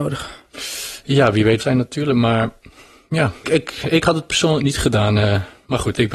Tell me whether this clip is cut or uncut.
cut